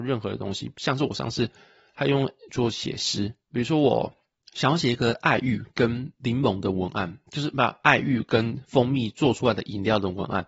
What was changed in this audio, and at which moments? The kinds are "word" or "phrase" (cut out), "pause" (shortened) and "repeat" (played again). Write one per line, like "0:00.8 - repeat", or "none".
0:02.5 - word